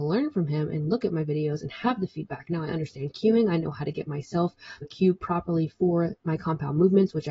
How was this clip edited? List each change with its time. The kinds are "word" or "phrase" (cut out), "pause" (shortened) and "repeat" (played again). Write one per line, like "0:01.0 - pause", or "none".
0:04.8 - word

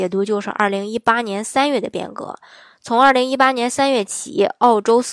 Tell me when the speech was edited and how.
none

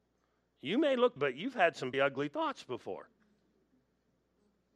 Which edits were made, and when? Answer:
0:01.2 - word
0:01.9 - word

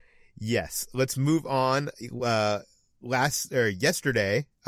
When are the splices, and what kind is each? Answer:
none

